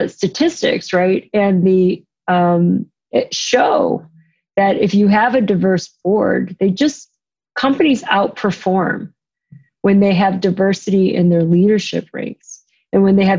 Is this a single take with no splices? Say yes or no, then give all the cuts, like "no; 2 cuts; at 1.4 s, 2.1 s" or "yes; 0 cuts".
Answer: yes; 0 cuts